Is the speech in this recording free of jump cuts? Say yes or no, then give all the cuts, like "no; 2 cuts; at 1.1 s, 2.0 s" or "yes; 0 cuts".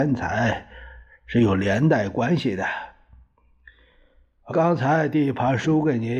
no; 1 cut; at 4.5 s